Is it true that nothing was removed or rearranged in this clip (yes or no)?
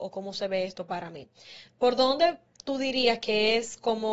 yes